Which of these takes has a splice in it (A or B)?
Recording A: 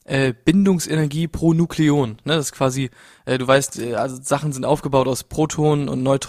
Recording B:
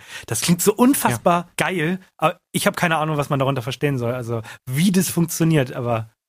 B